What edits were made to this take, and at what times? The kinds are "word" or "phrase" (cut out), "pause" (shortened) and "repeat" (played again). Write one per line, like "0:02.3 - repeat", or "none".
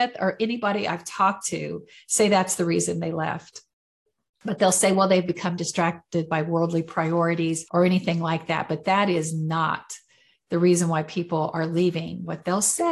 none